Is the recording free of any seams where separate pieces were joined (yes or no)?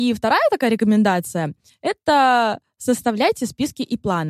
yes